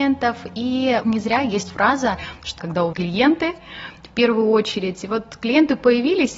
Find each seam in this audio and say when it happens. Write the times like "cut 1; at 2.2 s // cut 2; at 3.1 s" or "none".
cut 1; at 1.0 s // cut 2; at 2.6 s // cut 3; at 2.9 s